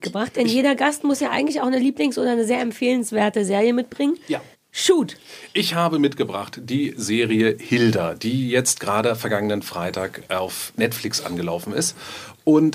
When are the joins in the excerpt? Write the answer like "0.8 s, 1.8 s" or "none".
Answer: 4.5 s